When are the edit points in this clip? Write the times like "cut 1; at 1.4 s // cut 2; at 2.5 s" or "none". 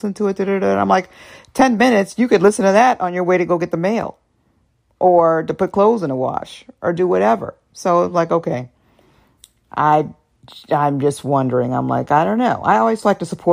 none